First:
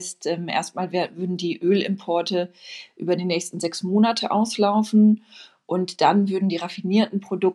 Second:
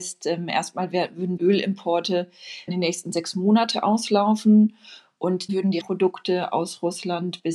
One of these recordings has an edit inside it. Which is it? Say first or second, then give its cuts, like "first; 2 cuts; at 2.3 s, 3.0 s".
second; 4 cuts; at 1.4 s, 2.7 s, 5.5 s, 5.8 s